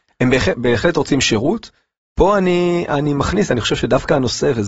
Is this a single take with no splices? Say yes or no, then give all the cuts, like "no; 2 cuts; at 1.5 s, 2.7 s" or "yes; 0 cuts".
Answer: yes; 0 cuts